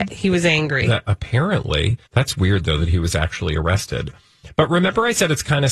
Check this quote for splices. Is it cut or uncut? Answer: cut